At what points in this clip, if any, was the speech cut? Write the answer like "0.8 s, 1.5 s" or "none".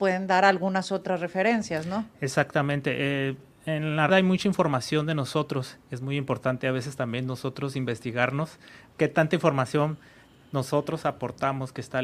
4.1 s